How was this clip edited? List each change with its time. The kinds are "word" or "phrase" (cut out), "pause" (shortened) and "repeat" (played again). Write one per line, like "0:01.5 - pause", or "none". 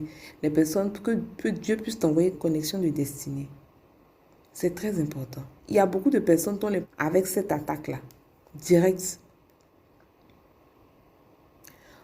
0:02.3 - word
0:05.5 - pause
0:06.8 - phrase